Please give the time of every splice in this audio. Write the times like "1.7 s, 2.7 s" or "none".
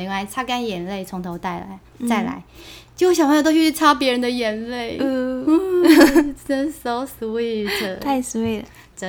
none